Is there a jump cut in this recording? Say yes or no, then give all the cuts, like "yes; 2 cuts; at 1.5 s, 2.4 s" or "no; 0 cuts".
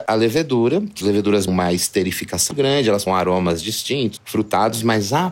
yes; 5 cuts; at 1.0 s, 1.5 s, 2.5 s, 3.1 s, 4.2 s